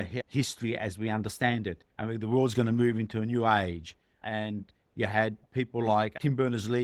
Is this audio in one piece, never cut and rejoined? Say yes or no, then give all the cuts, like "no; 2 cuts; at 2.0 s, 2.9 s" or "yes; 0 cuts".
no; 1 cut; at 1.9 s